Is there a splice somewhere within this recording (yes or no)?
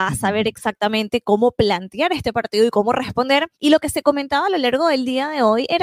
yes